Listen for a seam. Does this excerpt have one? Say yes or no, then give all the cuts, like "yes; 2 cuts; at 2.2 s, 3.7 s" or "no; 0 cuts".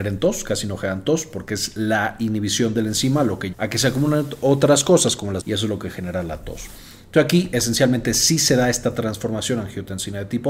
yes; 2 cuts; at 3.5 s, 5.4 s